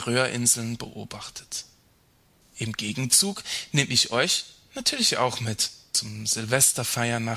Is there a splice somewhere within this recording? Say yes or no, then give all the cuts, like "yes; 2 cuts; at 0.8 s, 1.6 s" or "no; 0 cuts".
no; 0 cuts